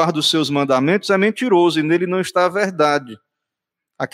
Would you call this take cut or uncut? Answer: uncut